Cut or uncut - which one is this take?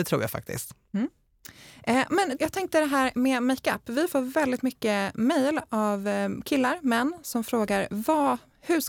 cut